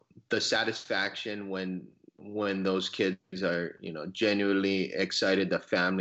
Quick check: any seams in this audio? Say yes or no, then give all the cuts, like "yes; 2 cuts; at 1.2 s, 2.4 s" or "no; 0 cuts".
no; 0 cuts